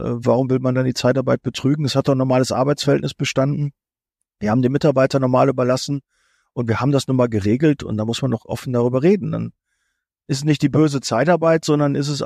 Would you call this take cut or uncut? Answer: uncut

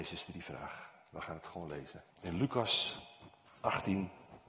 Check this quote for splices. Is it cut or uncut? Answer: cut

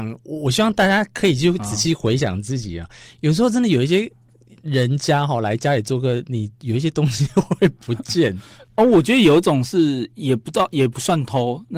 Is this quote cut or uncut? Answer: uncut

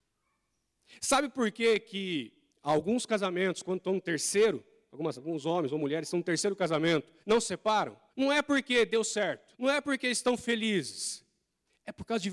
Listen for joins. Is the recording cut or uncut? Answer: cut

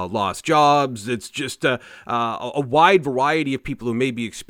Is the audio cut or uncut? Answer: uncut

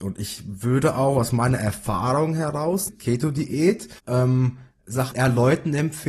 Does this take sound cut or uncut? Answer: cut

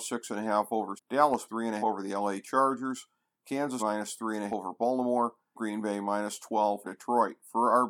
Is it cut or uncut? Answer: cut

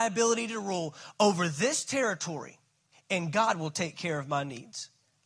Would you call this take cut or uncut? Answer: cut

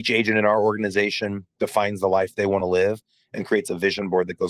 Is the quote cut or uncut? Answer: uncut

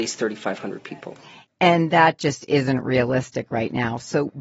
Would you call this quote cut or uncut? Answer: uncut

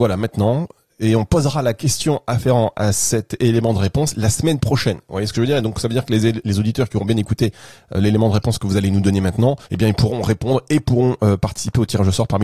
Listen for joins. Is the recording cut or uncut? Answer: cut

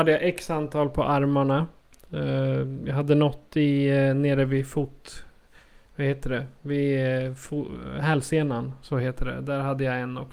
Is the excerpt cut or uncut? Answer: uncut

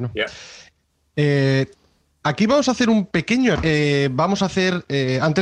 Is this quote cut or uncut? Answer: cut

